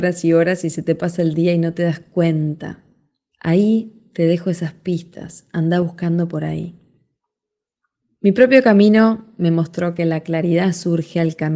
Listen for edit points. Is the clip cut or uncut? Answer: uncut